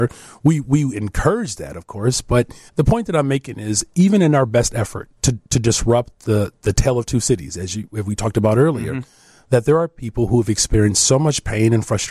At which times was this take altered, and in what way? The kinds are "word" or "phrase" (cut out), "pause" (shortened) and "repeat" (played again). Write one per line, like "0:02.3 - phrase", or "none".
0:02.7 - pause
0:05.2 - pause